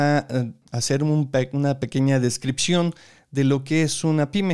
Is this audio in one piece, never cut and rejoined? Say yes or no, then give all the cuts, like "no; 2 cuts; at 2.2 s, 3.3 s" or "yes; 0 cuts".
yes; 0 cuts